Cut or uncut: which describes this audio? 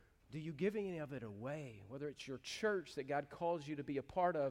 uncut